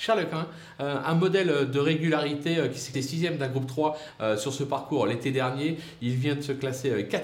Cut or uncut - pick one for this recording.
cut